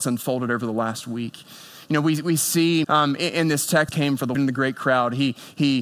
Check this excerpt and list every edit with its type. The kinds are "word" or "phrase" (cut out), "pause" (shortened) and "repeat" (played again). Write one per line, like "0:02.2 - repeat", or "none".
0:02.8 - word
0:03.9 - phrase
0:04.3 - phrase